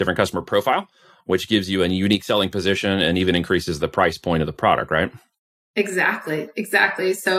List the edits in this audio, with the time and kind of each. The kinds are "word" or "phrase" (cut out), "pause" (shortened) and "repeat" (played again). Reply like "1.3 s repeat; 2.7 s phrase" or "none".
none